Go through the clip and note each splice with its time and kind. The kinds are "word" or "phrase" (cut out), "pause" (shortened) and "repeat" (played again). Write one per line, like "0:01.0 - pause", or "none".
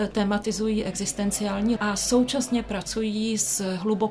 0:01.8 - word

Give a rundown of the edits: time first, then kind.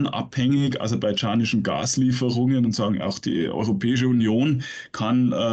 none

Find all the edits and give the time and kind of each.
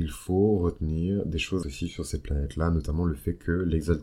0:01.6 - word

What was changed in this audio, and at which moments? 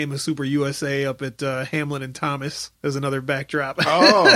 0:02.8 - pause

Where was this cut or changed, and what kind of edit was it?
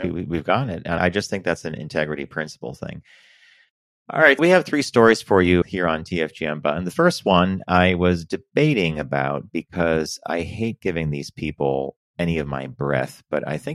0:01.0 - word
0:04.4 - word
0:05.6 - word
0:12.1 - word

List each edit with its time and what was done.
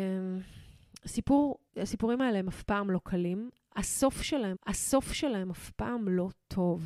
0:01.7 - pause
0:04.5 - repeat

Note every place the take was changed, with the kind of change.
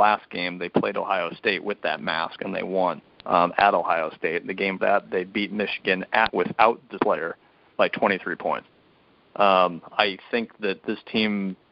0:03.2 - pause
0:04.8 - phrase
0:06.3 - word
0:07.0 - phrase

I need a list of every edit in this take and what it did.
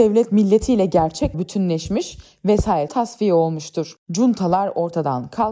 0:01.3 - word
0:02.9 - word
0:04.0 - pause

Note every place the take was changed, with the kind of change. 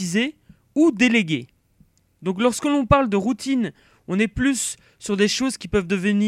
none

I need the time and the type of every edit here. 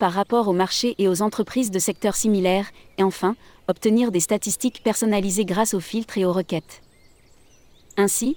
none

